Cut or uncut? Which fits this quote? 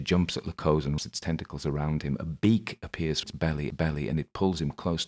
cut